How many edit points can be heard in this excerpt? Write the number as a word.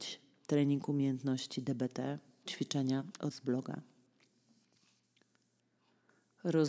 two